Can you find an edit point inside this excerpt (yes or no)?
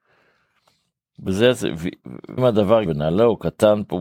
yes